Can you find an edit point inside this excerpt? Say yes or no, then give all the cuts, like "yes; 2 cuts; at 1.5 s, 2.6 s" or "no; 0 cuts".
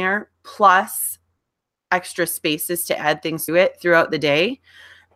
yes; 1 cut; at 3.5 s